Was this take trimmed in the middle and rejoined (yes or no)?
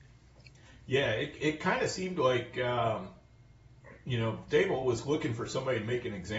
no